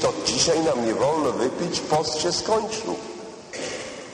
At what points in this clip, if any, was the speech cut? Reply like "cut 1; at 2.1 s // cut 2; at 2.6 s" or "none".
none